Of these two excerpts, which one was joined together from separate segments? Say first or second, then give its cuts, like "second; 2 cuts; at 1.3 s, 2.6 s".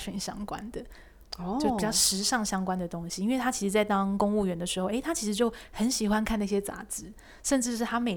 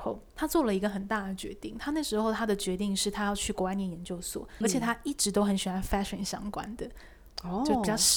second; 1 cut; at 4.6 s